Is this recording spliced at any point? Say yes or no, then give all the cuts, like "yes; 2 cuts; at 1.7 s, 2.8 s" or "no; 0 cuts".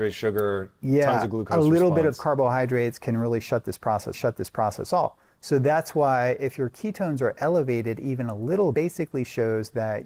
yes; 2 cuts; at 4.1 s, 8.7 s